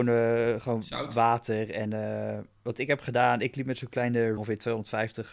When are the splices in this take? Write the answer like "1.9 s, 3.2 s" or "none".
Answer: 4.4 s